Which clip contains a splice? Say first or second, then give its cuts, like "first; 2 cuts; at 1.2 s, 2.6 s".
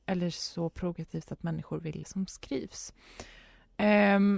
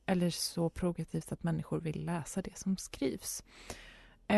first; 1 cut; at 2.0 s